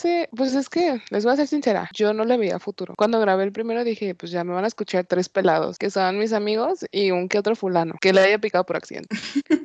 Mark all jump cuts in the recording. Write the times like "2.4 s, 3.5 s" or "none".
none